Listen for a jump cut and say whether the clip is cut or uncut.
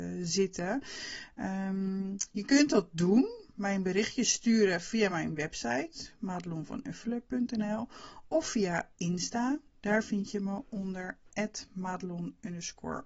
uncut